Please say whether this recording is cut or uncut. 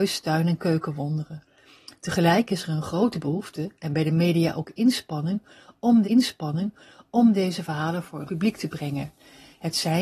cut